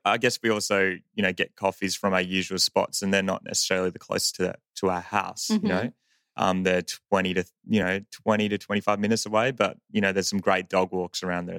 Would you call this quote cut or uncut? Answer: uncut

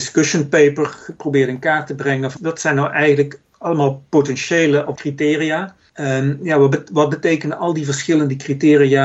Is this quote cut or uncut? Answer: cut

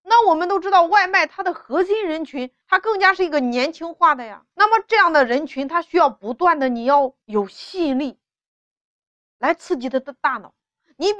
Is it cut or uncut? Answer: cut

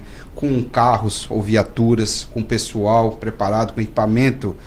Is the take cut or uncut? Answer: uncut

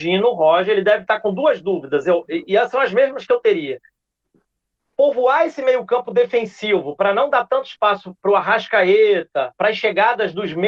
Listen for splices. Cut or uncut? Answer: uncut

